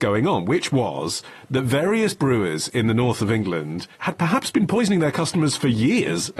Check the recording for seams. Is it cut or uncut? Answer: cut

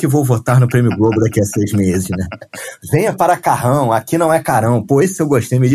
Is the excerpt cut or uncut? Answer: uncut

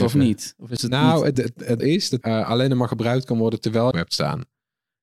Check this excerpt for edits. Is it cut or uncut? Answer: cut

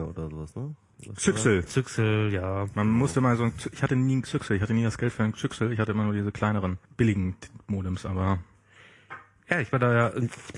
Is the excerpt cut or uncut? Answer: cut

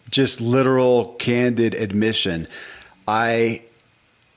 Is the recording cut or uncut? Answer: uncut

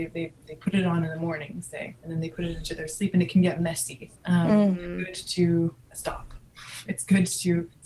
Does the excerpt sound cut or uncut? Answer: cut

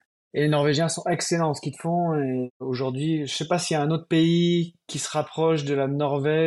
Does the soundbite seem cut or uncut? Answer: uncut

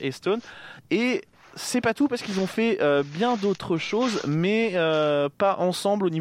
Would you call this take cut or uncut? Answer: uncut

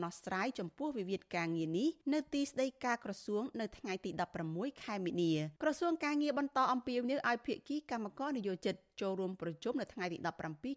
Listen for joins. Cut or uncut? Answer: cut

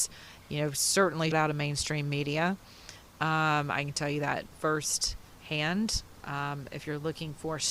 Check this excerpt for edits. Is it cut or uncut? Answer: cut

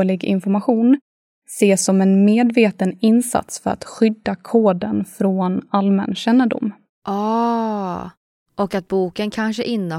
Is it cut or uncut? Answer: uncut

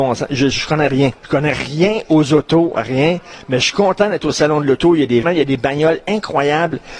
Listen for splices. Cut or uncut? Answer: cut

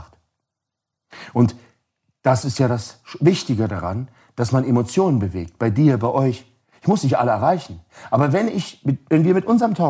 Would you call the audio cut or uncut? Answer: uncut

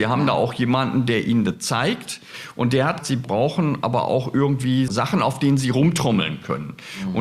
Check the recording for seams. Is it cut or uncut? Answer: cut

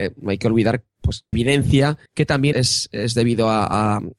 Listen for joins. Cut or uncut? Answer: cut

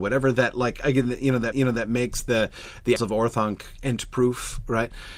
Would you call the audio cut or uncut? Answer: cut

